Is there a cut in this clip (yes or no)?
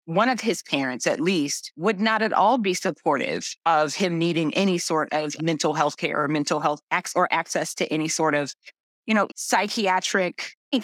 yes